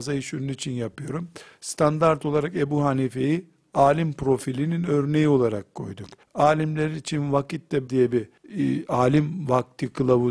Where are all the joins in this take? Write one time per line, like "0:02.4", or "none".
0:06.2
0:07.9
0:08.4